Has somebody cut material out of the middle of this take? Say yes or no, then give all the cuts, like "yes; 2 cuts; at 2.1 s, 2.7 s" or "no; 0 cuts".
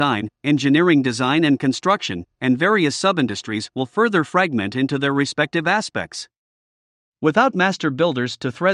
no; 0 cuts